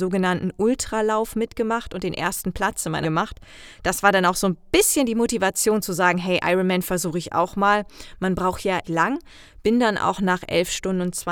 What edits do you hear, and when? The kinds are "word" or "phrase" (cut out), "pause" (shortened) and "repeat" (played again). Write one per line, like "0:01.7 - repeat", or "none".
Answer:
0:03.0 - word
0:08.8 - word